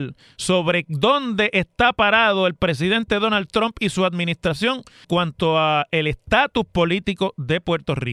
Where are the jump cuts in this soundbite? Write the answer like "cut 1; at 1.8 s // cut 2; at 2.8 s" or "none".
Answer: cut 1; at 5.0 s